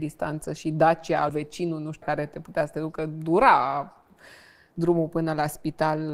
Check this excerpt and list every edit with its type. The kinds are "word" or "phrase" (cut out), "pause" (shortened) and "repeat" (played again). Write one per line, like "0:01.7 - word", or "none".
0:01.3 - word
0:02.0 - word